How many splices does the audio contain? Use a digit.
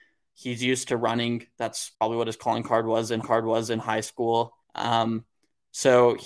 3